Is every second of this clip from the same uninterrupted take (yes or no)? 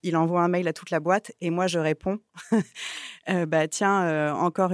yes